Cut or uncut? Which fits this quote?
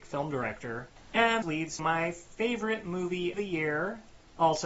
cut